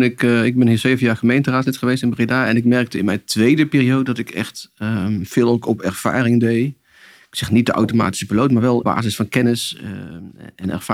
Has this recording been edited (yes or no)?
yes